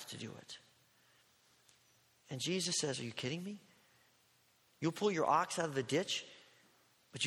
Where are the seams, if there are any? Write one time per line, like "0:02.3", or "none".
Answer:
none